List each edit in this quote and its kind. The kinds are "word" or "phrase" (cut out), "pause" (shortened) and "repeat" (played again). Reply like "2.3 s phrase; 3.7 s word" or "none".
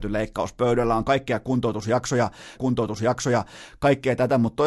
1.0 s word; 2.5 s repeat